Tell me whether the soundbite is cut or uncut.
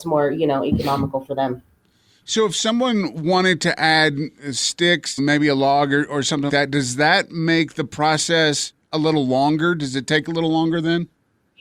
cut